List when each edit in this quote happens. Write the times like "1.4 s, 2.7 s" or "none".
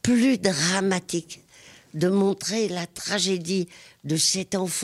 none